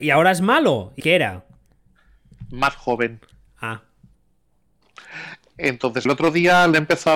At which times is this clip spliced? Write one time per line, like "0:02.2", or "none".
0:01.0
0:06.1